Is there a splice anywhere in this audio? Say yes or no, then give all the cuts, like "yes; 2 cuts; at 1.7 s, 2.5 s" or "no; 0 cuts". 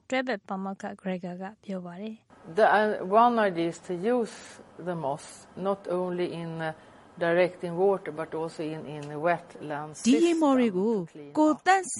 no; 0 cuts